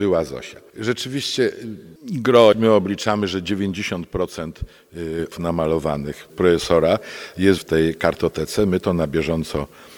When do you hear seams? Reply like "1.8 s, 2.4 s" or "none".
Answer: 2.5 s, 5.3 s, 6.3 s, 7.6 s